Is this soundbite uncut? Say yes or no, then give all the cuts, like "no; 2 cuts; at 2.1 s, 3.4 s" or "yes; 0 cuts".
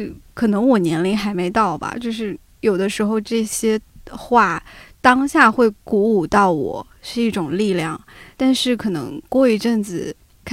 no; 1 cut; at 5.8 s